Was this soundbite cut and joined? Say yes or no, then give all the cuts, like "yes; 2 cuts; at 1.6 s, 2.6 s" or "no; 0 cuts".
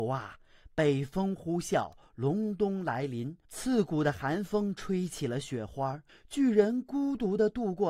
yes; 2 cuts; at 3.4 s, 6.1 s